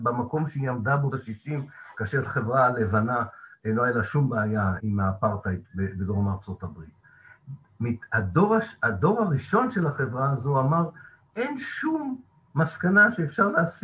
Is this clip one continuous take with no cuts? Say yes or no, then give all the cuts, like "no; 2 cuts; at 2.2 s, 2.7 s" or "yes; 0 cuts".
no; 3 cuts; at 1.1 s, 2.2 s, 4.8 s